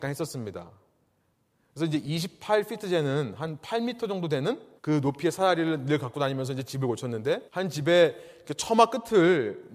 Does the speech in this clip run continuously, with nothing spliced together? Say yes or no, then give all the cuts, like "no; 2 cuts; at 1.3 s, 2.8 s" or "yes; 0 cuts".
no; 2 cuts; at 4.8 s, 7.5 s